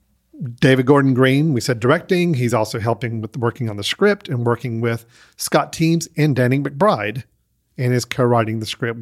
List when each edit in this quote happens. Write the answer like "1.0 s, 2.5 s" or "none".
none